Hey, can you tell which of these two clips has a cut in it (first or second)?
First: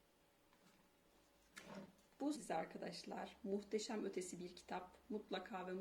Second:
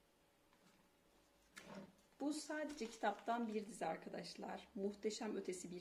first